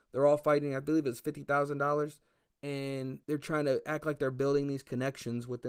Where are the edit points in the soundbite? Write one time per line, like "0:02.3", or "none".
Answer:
0:03.2